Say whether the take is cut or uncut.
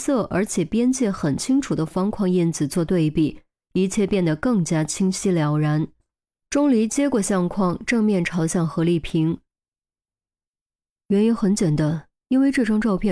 uncut